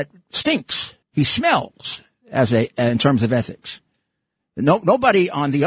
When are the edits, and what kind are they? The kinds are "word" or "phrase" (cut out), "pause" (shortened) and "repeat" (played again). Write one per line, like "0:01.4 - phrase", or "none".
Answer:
0:01.0 - pause